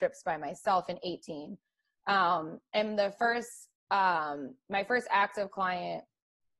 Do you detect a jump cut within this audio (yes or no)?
no